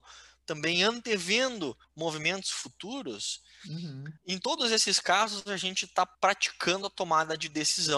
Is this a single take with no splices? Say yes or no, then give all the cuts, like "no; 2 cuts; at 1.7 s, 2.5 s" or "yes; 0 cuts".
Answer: no; 3 cuts; at 1.8 s, 4.2 s, 6.1 s